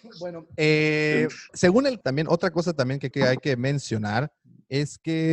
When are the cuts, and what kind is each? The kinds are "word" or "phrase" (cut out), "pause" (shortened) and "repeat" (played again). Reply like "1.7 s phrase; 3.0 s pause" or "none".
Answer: 1.5 s word; 2.0 s word; 3.1 s word